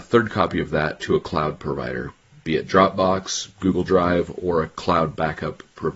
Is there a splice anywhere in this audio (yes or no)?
no